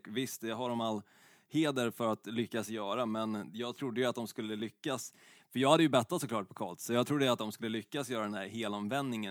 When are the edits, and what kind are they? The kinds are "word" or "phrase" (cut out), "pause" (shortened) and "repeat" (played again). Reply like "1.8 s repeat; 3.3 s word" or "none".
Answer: none